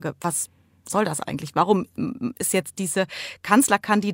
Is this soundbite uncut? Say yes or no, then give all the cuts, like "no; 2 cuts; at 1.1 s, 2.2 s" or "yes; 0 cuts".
yes; 0 cuts